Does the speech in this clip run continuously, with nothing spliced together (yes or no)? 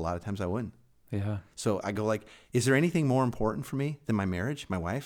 yes